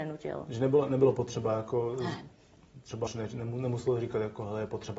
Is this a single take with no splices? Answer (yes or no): no